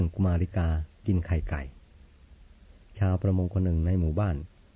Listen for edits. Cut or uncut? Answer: cut